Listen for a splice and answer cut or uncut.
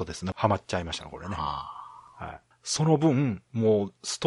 uncut